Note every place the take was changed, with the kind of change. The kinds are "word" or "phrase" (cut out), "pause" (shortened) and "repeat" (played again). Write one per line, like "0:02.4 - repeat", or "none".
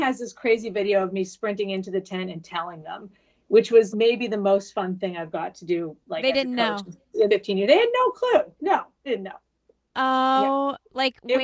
0:03.9 - word
0:07.3 - word
0:09.1 - word